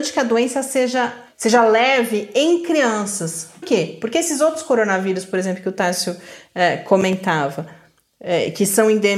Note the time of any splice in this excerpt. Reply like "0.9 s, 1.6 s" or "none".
3.6 s